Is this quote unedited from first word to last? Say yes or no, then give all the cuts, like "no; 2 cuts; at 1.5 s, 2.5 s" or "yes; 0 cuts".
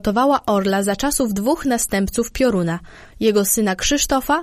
yes; 0 cuts